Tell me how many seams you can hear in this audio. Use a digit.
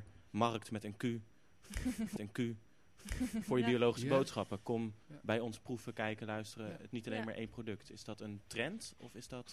2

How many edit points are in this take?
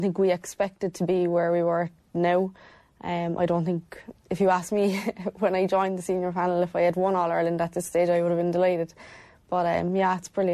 0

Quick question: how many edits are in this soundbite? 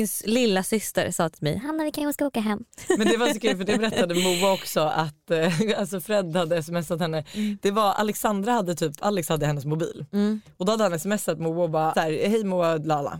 0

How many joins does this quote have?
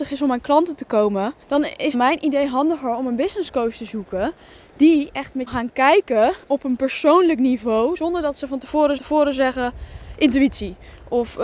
5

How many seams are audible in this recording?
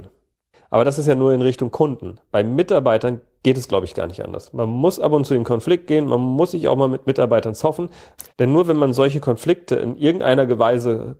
1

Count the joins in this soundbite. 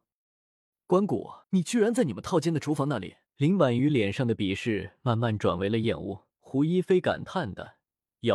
3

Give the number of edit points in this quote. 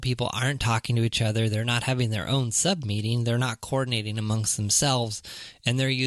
0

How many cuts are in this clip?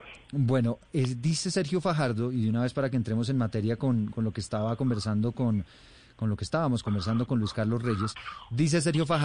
0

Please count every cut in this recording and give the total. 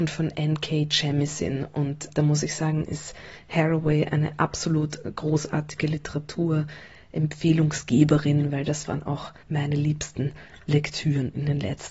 2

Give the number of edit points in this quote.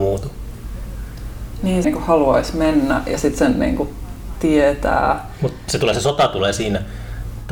1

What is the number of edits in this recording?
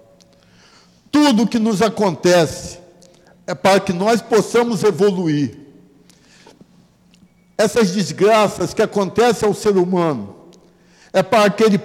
0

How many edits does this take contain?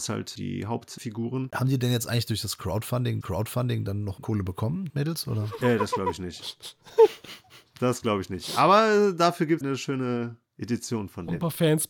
5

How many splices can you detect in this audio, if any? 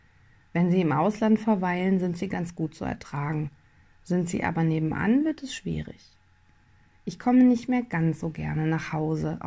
0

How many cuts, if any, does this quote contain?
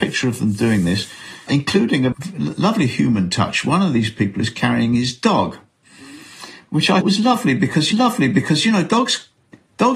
4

